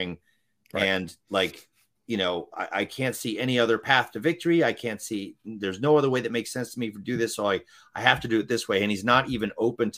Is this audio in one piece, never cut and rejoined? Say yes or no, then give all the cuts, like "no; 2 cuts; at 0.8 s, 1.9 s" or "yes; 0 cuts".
yes; 0 cuts